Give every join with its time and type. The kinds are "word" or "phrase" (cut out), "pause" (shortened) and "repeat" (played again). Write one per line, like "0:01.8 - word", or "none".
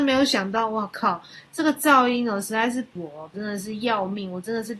0:03.0 - word
0:03.3 - phrase